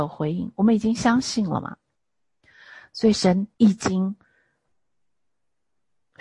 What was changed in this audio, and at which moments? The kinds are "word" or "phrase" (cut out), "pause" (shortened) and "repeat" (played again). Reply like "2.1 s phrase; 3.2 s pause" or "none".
3.5 s pause